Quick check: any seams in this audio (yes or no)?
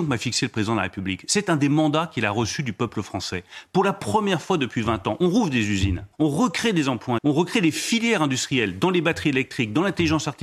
yes